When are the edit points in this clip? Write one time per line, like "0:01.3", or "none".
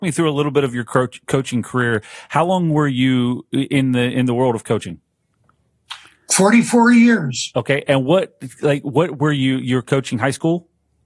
none